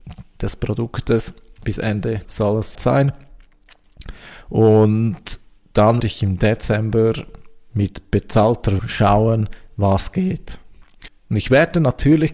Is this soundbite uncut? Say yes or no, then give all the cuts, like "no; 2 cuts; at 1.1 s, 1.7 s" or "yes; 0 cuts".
no; 4 cuts; at 2.2 s, 2.7 s, 6.0 s, 8.8 s